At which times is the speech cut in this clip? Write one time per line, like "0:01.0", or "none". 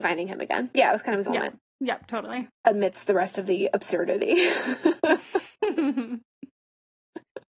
0:01.2
0:01.7
0:02.5